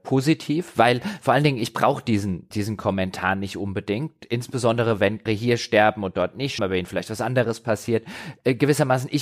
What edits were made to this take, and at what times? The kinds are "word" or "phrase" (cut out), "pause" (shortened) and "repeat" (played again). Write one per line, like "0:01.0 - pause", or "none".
0:02.5 - word
0:05.3 - word
0:06.6 - word